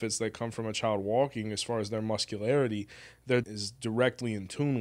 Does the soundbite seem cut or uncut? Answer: cut